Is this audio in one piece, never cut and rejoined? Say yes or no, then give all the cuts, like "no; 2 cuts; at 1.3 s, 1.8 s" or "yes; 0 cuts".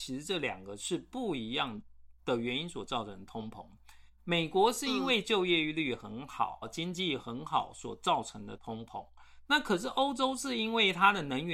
no; 1 cut; at 6.6 s